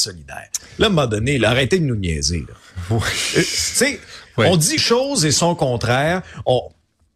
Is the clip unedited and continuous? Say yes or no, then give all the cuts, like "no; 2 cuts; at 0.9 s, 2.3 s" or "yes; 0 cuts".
no; 1 cut; at 4.8 s